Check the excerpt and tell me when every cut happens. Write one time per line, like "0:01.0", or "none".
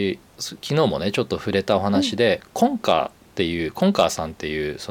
none